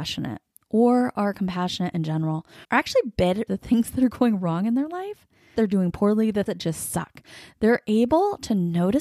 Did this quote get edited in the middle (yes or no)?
yes